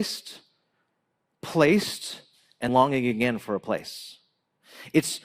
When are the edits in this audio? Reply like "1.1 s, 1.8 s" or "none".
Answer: 2.7 s